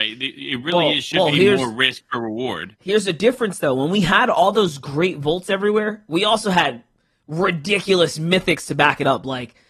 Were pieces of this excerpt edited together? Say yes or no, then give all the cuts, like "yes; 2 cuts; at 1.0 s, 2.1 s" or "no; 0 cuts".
no; 0 cuts